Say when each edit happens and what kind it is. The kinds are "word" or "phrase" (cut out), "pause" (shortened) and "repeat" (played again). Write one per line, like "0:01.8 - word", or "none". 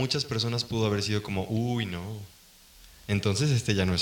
none